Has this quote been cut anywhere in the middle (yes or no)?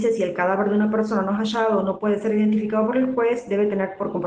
no